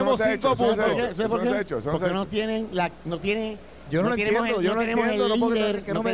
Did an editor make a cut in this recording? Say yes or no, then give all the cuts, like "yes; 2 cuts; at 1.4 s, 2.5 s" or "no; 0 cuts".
no; 0 cuts